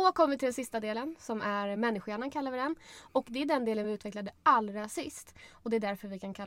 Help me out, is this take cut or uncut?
uncut